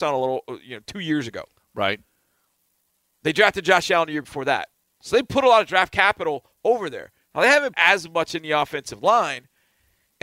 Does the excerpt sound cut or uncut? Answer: cut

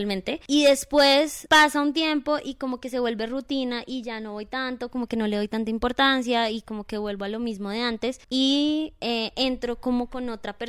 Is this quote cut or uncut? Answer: cut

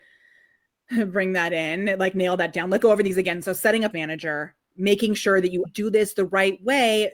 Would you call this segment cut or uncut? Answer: cut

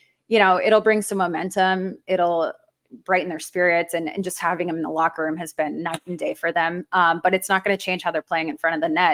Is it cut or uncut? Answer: uncut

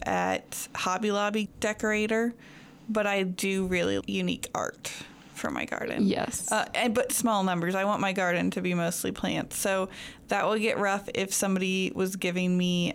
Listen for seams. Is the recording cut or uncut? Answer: cut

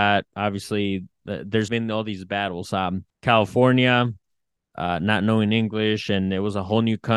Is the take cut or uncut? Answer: cut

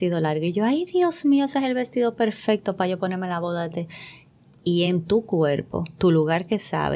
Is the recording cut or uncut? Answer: uncut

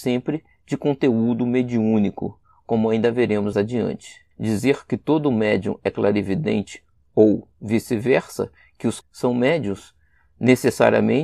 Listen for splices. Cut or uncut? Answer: cut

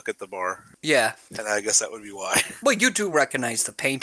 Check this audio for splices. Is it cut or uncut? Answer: uncut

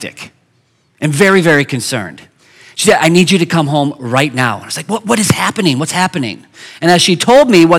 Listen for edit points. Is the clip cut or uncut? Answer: uncut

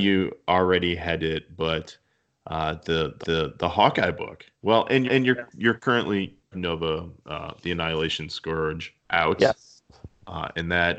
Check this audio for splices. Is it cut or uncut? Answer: cut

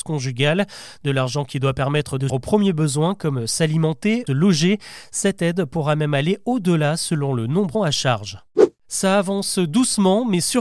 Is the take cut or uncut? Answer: cut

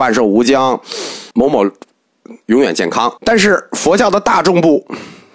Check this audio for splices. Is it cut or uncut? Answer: cut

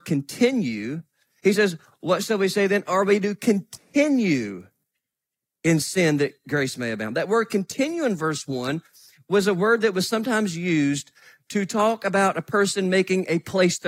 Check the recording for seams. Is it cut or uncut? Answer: uncut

